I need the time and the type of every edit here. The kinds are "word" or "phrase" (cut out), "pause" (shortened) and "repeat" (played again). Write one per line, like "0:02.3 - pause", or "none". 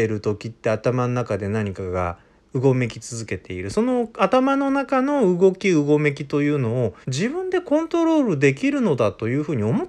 0:07.0 - pause